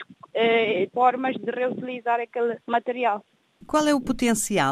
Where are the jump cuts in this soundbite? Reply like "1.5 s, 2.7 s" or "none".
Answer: 0.9 s, 2.6 s